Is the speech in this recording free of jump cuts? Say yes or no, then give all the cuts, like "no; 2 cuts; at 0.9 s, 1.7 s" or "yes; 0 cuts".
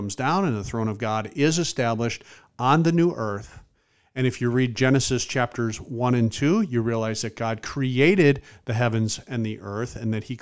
yes; 0 cuts